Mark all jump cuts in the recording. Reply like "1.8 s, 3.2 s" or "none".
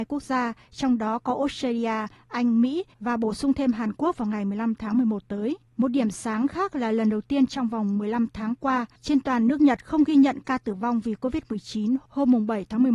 2.9 s, 5.7 s